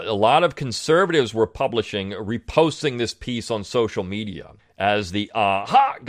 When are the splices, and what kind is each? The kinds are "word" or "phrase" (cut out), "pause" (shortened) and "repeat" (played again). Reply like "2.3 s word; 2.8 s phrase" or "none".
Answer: 4.6 s pause